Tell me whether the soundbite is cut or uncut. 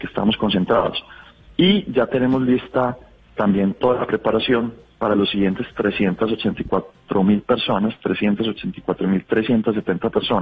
uncut